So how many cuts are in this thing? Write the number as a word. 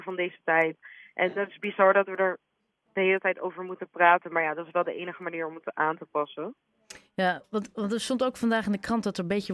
zero